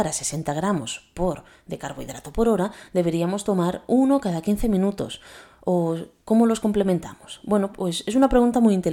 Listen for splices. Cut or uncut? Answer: uncut